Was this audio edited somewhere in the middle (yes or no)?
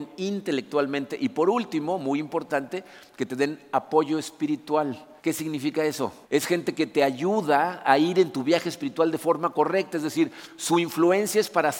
yes